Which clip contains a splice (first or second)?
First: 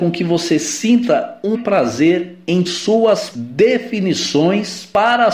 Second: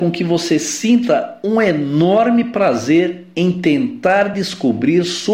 first